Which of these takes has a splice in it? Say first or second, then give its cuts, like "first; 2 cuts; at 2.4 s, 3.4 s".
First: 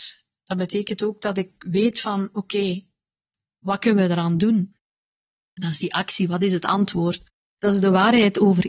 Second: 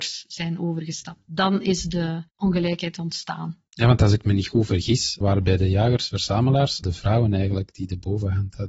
second; 4 cuts; at 2.3 s, 3.7 s, 5.2 s, 6.8 s